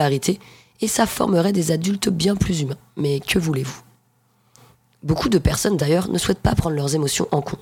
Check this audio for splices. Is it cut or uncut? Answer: uncut